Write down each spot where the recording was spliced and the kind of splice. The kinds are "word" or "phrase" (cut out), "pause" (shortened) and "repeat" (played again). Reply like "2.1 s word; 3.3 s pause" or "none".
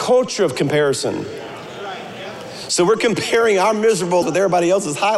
4.2 s word